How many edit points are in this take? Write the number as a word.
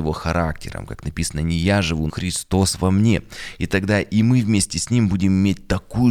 one